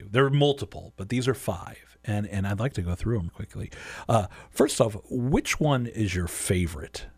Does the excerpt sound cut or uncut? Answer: uncut